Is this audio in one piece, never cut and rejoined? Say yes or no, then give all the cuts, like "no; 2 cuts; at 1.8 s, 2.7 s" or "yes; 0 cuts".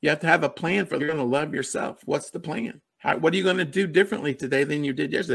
no; 1 cut; at 1.0 s